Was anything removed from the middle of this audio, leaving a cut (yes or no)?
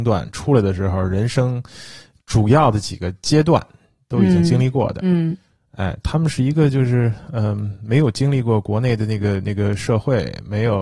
no